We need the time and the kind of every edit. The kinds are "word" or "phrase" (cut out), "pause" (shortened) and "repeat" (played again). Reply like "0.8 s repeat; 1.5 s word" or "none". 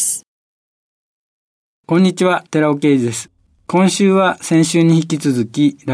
2.5 s pause